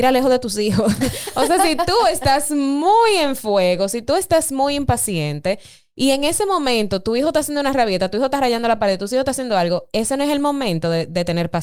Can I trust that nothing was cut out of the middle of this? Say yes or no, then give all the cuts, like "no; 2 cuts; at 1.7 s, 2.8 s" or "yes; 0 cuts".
yes; 0 cuts